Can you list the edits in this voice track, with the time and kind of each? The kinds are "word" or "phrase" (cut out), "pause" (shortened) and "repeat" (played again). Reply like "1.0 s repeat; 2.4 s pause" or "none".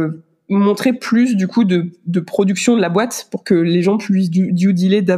none